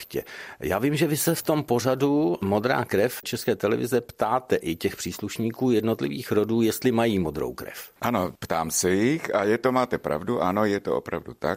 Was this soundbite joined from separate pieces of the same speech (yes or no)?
yes